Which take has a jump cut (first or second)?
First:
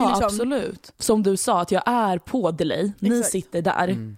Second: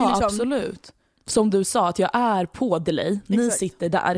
first